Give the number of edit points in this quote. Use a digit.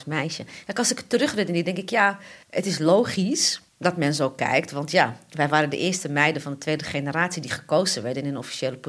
2